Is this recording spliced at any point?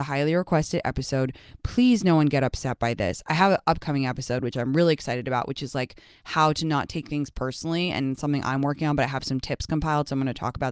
no; 0 cuts

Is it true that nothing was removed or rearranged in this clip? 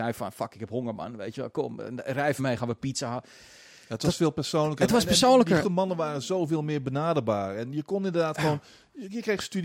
no; 2 cuts; at 2.4 s, 5.6 s

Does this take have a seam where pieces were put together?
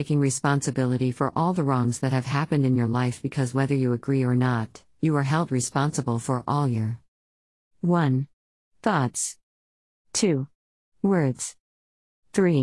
no; 0 cuts

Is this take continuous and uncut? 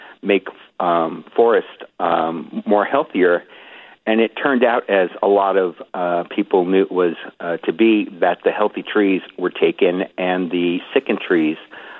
yes; 0 cuts

